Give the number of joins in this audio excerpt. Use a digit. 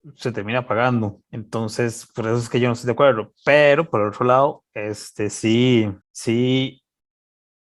2